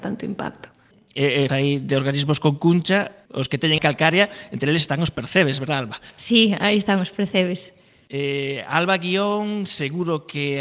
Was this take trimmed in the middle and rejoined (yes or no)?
yes